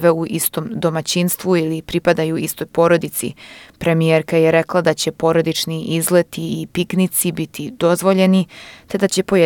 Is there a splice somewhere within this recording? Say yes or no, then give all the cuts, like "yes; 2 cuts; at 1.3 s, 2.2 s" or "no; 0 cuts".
no; 0 cuts